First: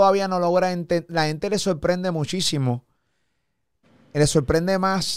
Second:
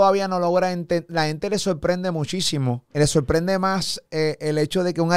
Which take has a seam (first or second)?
second